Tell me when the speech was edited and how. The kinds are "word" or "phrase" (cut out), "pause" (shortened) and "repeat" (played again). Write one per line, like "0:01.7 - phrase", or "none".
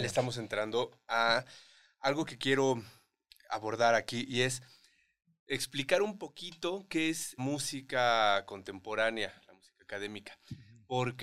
0:07.4 - word